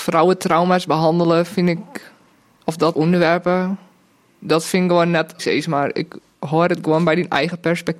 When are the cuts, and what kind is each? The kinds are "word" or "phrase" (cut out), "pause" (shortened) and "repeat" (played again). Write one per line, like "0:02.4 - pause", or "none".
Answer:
0:02.4 - pause
0:02.9 - word
0:05.4 - word